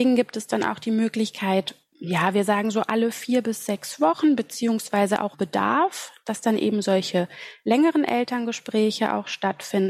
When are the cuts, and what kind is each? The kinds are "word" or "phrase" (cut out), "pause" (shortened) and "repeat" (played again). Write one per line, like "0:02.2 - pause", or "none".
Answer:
0:05.3 - word